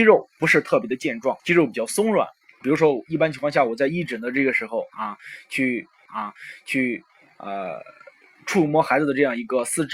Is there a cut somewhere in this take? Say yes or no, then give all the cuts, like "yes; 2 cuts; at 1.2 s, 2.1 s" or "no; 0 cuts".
yes; 3 cuts; at 1.4 s, 2.6 s, 6.1 s